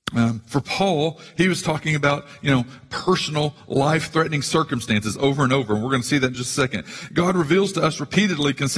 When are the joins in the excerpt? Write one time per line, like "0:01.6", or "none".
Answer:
none